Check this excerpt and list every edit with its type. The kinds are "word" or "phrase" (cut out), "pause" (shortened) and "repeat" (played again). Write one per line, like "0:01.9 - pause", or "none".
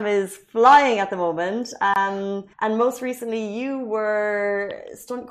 0:02.5 - pause